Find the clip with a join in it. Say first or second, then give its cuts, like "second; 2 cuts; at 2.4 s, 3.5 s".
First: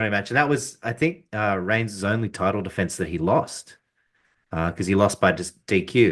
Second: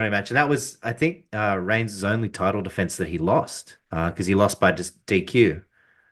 second; 1 cut; at 3.8 s